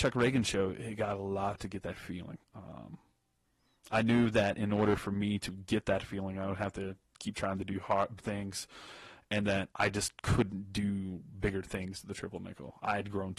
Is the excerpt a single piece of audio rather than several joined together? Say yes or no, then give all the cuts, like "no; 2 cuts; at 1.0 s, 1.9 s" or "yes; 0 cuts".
no; 4 cuts; at 1.5 s, 2.4 s, 8.2 s, 9.7 s